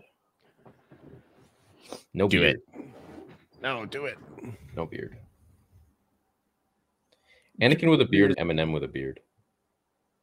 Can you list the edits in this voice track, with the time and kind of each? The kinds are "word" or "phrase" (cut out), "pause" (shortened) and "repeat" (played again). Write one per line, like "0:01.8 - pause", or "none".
0:08.3 - word